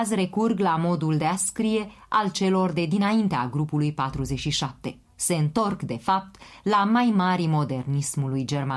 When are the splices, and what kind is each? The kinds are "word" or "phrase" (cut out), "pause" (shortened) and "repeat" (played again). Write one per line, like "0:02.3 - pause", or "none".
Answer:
0:05.0 - pause